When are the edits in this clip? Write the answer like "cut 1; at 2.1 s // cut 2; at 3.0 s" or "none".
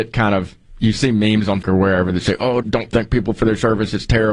cut 1; at 1.6 s // cut 2; at 2.6 s